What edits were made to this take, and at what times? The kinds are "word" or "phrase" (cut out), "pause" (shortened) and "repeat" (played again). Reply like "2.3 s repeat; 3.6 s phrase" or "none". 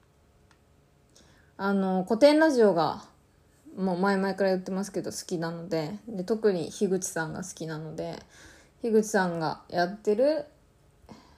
none

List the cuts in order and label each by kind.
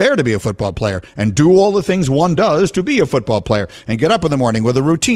none

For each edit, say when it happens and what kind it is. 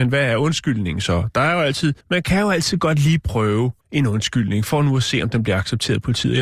2.0 s pause; 3.8 s pause

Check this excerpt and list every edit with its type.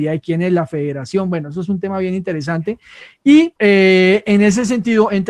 3.6 s pause

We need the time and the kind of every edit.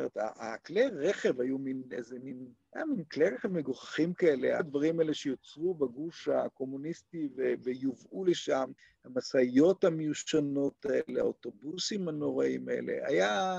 2.6 s pause; 4.6 s phrase; 8.8 s pause

